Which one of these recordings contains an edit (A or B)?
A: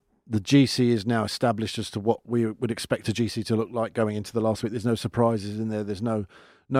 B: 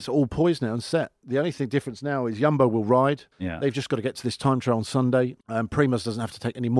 B